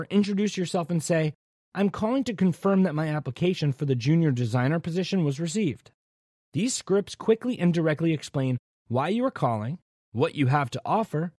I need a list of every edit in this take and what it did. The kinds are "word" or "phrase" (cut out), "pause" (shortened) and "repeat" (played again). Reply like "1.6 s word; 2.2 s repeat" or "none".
none